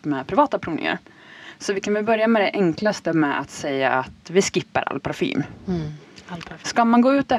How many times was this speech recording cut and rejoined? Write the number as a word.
zero